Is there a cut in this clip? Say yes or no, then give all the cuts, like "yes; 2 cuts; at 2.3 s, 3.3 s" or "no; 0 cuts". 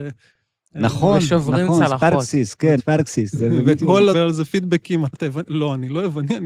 yes; 3 cuts; at 2.8 s, 4.1 s, 5.1 s